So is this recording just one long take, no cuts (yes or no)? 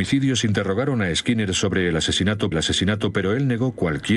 no